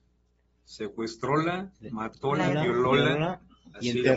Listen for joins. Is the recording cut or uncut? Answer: uncut